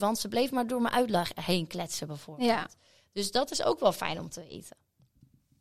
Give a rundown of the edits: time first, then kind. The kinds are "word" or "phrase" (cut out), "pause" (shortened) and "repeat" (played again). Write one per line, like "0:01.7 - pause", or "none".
none